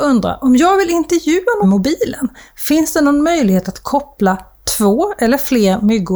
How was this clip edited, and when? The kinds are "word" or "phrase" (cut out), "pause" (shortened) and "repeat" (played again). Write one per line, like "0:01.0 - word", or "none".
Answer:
0:01.6 - phrase

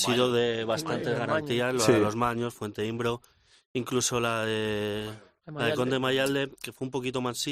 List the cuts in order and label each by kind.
none

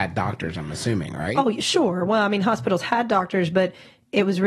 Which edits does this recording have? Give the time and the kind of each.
none

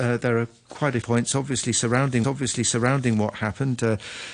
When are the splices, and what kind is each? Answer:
0:01.0 - phrase
0:02.2 - repeat

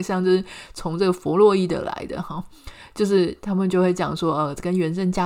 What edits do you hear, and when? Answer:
none

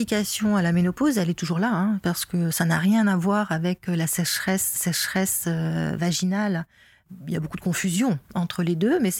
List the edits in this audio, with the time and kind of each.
0:04.8 - repeat

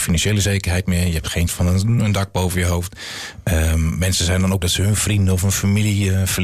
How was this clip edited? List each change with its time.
0:01.5 - word
0:04.6 - word

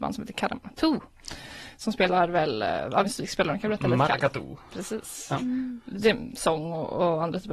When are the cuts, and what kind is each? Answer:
0:03.0 - word

